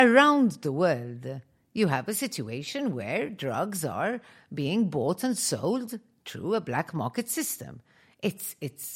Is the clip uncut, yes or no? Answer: yes